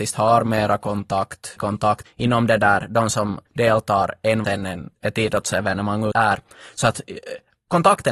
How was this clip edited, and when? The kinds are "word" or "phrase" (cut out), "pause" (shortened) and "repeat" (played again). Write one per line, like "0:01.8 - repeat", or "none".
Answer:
0:01.6 - word
0:02.1 - word
0:03.5 - pause
0:04.4 - word
0:04.9 - word
0:06.1 - word